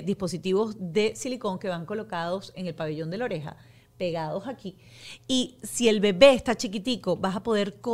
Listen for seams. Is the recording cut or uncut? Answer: uncut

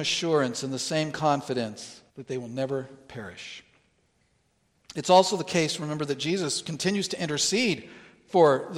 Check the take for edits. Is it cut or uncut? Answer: cut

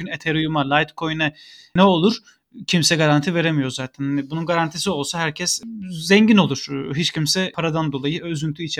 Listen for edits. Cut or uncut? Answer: uncut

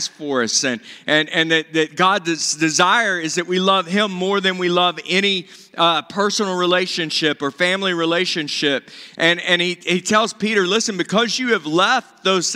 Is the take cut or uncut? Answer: uncut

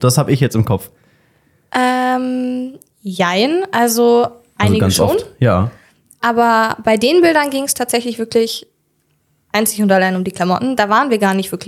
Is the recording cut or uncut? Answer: uncut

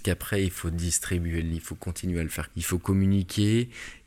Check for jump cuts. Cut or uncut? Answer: cut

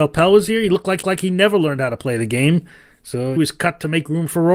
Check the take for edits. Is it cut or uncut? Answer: cut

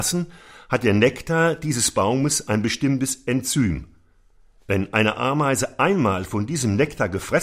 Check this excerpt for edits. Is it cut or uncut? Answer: uncut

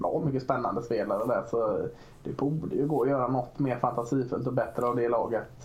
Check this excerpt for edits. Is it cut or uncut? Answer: uncut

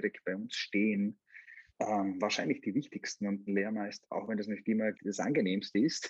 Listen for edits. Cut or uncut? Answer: cut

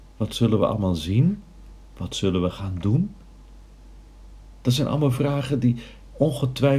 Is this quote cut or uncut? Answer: uncut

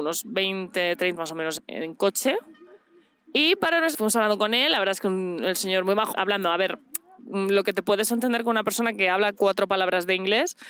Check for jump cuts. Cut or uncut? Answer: cut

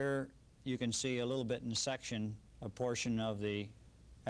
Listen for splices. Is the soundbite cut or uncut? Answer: uncut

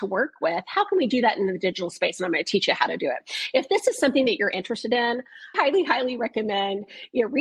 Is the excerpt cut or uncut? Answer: cut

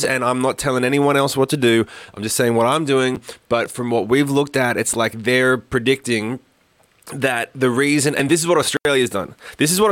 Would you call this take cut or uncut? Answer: uncut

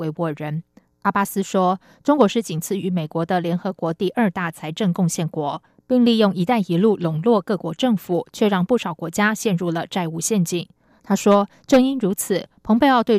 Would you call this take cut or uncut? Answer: uncut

